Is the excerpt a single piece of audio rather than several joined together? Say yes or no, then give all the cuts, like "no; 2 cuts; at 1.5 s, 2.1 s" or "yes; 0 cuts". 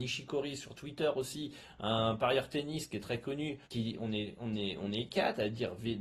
no; 1 cut; at 3.6 s